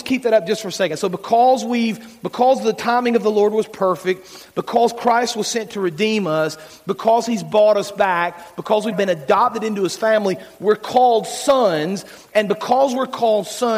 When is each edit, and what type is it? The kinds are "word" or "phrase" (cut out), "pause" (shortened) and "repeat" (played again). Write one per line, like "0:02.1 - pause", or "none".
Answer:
0:08.9 - word